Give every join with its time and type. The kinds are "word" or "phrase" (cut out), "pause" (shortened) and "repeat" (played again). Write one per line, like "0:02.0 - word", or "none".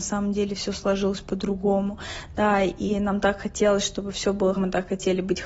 0:04.6 - word

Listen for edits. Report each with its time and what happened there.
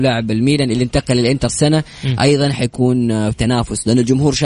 0:01.5 - word
0:03.3 - word

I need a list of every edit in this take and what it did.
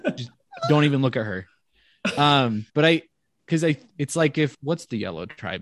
0:02.7 - pause
0:04.5 - word

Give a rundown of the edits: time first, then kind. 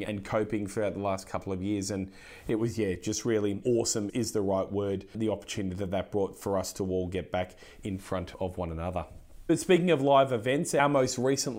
none

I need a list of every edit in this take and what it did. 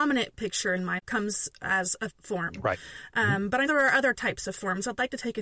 0:01.0 - word
0:02.1 - word
0:03.7 - word

